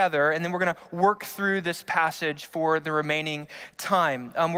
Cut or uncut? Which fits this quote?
uncut